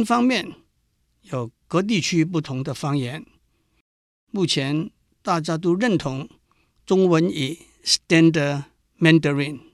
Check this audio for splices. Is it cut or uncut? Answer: uncut